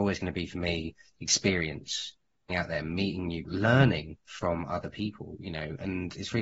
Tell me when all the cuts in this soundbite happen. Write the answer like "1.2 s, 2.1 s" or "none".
2.5 s, 3.4 s